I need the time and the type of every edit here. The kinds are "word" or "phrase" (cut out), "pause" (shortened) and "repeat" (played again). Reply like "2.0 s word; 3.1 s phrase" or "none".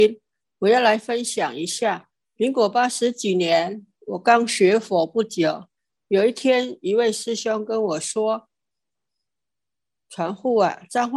none